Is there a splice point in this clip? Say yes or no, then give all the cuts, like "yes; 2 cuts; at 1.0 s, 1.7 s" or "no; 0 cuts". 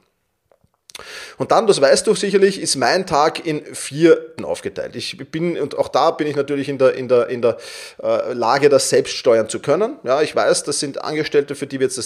yes; 1 cut; at 4.4 s